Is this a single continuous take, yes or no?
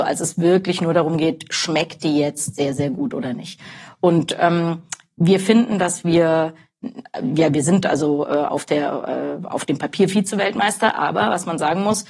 yes